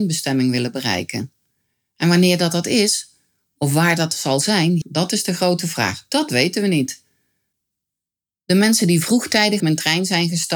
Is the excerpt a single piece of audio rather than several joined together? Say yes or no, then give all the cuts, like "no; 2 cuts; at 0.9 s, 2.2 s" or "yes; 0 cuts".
no; 2 cuts; at 4.8 s, 9.6 s